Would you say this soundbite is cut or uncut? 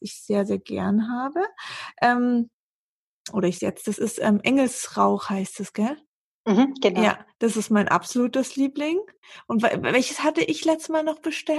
cut